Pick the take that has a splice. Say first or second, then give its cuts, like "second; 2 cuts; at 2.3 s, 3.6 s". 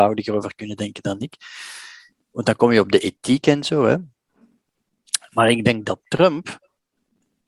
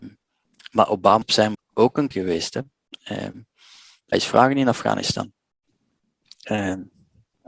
second; 4 cuts; at 1.2 s, 1.5 s, 2.1 s, 4.1 s